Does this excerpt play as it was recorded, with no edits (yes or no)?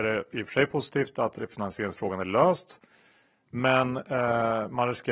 yes